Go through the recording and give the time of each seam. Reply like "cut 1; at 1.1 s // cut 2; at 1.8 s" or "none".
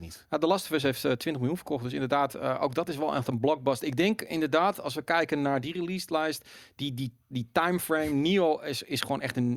none

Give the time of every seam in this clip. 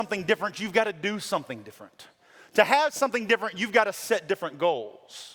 none

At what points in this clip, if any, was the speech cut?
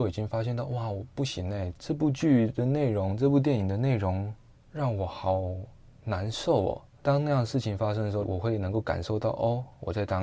none

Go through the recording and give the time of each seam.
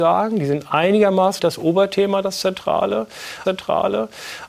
cut 1; at 1.4 s // cut 2; at 3.4 s

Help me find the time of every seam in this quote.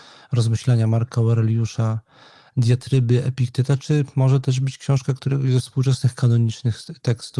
none

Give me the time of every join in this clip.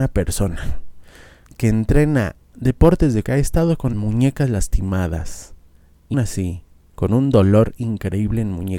cut 1; at 3.2 s // cut 2; at 3.9 s // cut 3; at 6.1 s

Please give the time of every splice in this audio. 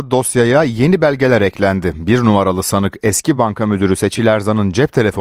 none

